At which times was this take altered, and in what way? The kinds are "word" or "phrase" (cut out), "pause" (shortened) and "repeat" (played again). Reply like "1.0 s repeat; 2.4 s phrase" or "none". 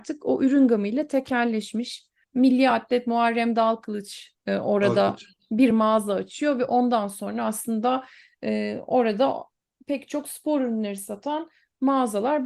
none